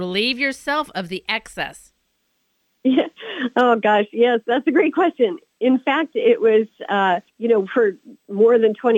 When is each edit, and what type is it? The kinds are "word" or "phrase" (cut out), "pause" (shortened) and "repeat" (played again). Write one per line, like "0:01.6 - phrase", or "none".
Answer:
0:07.3 - pause